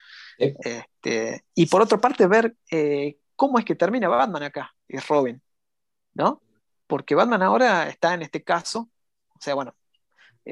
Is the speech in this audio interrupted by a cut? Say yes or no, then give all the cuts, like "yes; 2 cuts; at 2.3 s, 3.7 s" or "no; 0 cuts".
yes; 2 cuts; at 1.5 s, 4.8 s